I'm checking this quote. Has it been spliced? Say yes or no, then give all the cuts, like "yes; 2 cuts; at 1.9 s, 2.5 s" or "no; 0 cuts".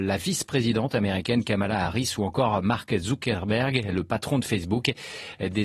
no; 0 cuts